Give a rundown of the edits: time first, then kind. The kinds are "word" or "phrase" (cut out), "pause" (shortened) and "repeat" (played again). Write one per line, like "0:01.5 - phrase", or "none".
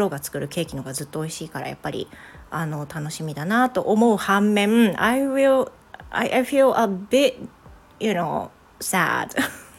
none